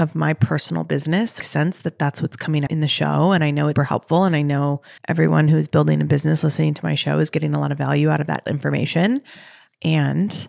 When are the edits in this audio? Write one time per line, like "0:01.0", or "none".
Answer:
0:01.4
0:02.7
0:03.8
0:05.0
0:08.5